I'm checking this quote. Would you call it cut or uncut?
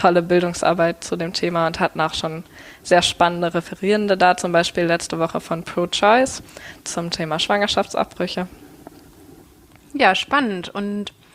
uncut